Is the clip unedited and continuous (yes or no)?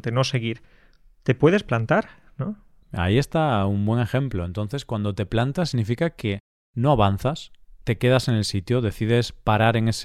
yes